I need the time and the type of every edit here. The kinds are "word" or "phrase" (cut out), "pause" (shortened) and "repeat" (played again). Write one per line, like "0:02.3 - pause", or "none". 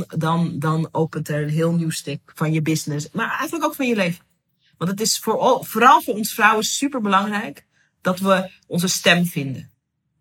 none